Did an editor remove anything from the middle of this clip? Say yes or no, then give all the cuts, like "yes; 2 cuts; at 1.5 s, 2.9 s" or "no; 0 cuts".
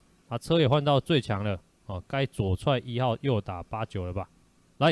no; 0 cuts